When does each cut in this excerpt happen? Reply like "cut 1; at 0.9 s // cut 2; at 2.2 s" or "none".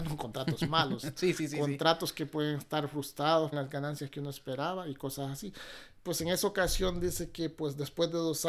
cut 1; at 3.5 s